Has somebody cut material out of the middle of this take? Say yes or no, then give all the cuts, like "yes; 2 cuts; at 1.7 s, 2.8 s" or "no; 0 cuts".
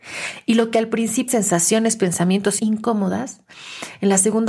yes; 2 cuts; at 1.3 s, 2.6 s